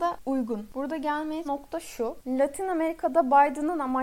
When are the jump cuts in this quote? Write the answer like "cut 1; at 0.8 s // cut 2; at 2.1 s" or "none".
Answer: cut 1; at 1.4 s